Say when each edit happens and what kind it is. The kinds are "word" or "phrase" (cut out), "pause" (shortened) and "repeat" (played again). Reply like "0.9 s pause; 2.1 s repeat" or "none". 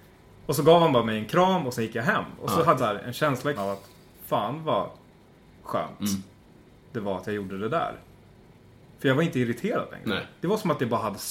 2.8 s word; 3.6 s word